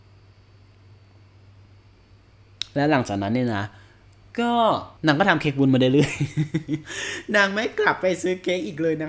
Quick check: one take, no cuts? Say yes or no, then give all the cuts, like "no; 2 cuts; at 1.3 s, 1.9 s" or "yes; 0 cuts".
no; 1 cut; at 5.0 s